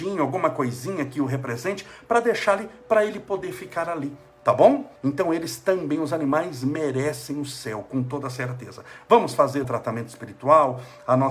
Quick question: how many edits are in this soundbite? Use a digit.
2